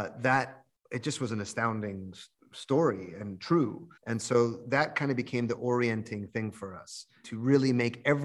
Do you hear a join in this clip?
yes; 2 cuts; at 2.3 s, 4.0 s

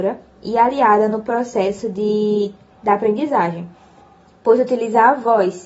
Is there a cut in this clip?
no; 0 cuts

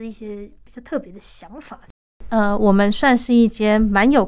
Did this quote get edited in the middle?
no; 0 cuts

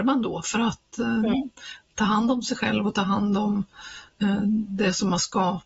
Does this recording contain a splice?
no; 0 cuts

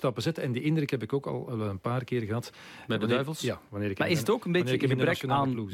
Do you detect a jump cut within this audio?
no; 0 cuts

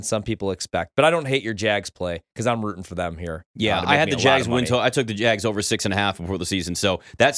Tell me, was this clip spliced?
no; 0 cuts

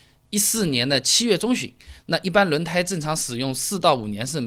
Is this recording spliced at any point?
no; 0 cuts

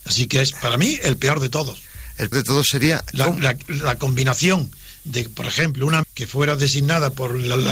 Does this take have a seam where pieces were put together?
yes; 3 cuts; at 2.3 s, 3.1 s, 6.0 s

